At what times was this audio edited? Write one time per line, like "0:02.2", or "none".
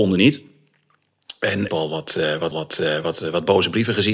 0:01.7
0:02.5